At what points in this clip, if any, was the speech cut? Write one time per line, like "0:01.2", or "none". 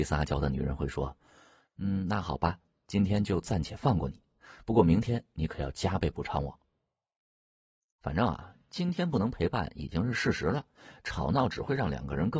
none